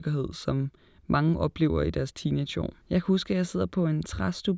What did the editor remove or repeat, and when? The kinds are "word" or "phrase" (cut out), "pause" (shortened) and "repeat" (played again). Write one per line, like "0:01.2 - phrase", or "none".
0:02.8 - pause